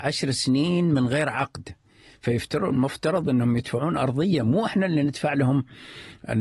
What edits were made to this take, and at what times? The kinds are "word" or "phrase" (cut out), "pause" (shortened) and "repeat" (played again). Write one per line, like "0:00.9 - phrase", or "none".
none